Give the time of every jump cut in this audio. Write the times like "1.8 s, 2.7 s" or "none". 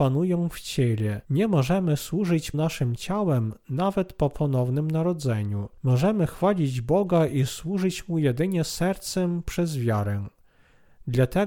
1.2 s, 2.5 s, 5.8 s